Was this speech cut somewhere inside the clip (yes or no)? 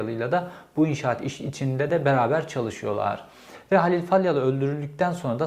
no